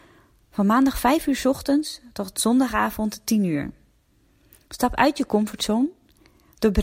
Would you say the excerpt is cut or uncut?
uncut